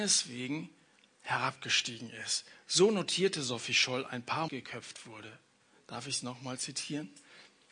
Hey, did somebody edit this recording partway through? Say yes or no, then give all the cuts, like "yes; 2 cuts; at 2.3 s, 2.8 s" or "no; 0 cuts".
yes; 1 cut; at 4.5 s